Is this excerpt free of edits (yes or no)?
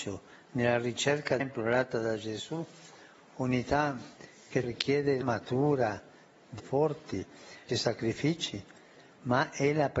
no